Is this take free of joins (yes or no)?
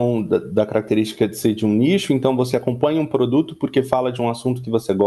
yes